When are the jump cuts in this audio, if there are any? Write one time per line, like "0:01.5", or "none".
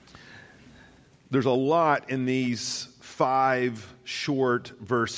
none